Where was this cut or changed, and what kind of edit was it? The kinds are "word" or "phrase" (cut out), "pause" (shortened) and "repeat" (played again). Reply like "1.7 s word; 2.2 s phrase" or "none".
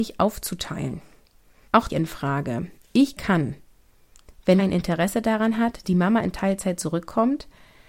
1.9 s phrase; 3.2 s phrase; 4.6 s phrase; 5.8 s word